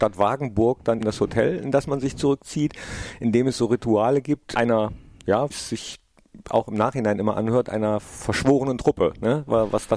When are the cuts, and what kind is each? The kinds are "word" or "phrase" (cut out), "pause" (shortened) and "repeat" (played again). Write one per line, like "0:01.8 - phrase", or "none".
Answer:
0:01.0 - word
0:05.5 - word